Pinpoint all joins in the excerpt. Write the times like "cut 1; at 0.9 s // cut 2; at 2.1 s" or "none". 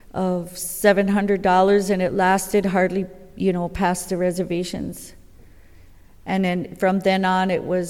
none